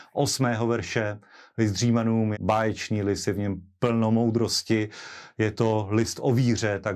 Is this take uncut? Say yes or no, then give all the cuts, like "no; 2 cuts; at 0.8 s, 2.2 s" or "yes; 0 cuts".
no; 1 cut; at 2.3 s